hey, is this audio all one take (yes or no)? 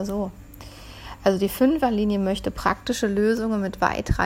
yes